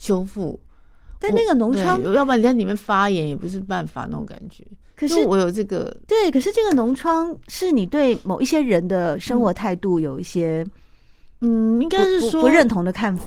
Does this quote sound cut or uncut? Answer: uncut